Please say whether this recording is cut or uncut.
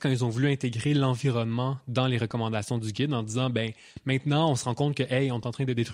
uncut